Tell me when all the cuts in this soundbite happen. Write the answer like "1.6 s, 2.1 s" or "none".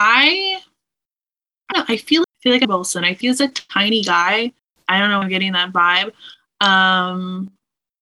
1.7 s, 2.2 s, 2.6 s, 3.2 s, 4.6 s, 5.2 s